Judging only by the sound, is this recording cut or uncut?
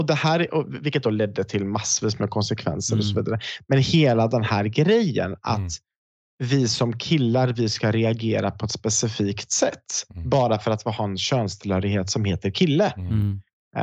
uncut